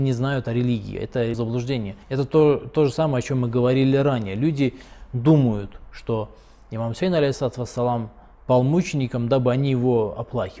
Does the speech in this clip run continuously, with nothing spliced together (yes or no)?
no